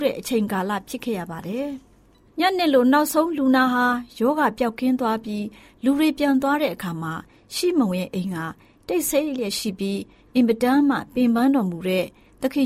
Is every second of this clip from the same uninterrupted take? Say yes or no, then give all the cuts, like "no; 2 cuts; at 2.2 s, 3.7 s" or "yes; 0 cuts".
yes; 0 cuts